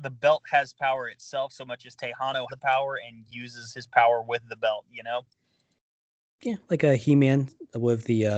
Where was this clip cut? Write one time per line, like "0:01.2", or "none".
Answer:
0:02.5